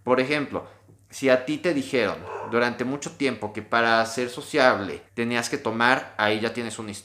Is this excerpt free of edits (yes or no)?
no